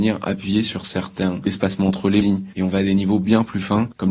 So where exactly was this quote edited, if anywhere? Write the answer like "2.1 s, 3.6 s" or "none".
2.2 s